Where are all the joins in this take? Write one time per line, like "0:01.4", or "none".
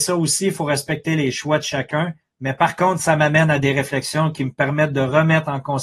0:02.2